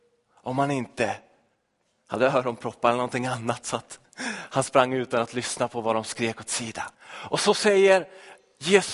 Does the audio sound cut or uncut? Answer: cut